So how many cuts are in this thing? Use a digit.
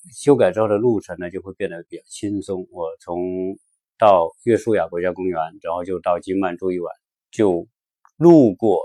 1